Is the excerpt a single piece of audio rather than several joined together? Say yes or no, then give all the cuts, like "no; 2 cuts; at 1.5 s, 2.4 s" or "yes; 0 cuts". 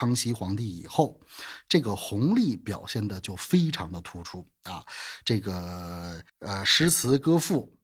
no; 1 cut; at 6.3 s